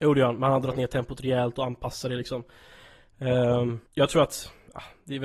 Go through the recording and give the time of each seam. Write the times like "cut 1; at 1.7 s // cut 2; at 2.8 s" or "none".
cut 1; at 3.9 s